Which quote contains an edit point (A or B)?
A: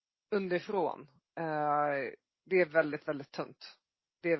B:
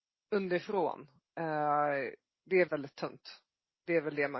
B